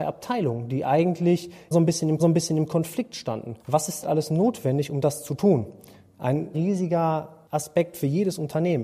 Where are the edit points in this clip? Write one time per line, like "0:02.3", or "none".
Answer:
0:01.7
0:02.2
0:03.6
0:04.0
0:06.5